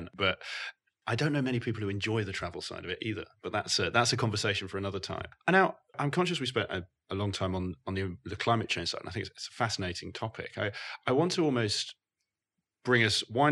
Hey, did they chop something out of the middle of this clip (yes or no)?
no